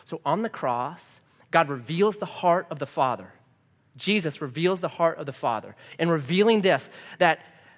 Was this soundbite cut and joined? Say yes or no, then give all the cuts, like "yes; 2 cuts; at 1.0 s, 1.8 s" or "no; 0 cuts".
no; 0 cuts